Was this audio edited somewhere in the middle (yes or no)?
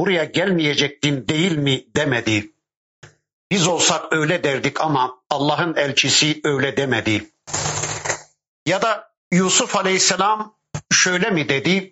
no